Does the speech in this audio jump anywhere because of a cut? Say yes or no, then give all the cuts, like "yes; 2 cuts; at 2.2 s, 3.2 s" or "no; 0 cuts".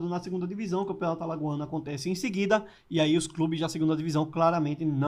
no; 0 cuts